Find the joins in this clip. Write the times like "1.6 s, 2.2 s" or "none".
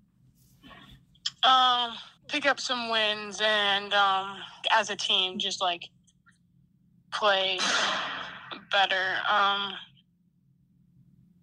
2.2 s, 4.6 s